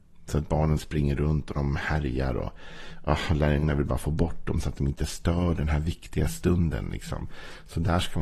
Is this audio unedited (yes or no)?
yes